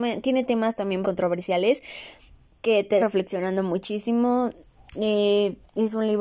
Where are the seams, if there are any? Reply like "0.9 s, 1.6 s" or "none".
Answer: 1.0 s, 3.0 s